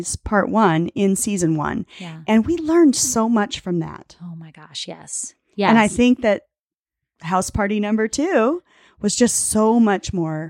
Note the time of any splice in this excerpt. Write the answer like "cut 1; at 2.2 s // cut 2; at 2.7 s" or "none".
none

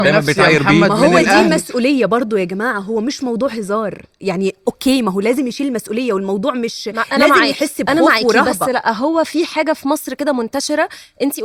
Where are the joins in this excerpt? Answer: none

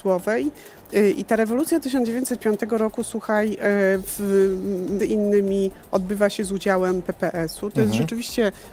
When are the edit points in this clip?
cut 1; at 5.0 s

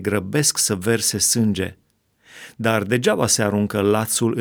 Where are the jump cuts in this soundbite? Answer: none

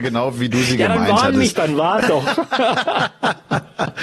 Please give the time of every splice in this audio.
cut 1; at 1.5 s // cut 2; at 2.0 s

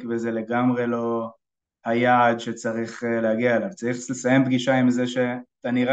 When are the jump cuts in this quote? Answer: none

